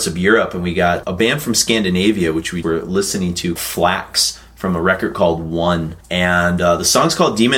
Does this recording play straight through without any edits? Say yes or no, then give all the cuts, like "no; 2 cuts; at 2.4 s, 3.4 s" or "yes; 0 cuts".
no; 4 cuts; at 1.0 s, 2.6 s, 3.6 s, 6.0 s